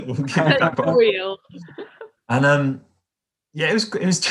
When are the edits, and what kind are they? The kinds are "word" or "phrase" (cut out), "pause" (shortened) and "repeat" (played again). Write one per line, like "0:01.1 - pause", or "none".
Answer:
0:02.2 - word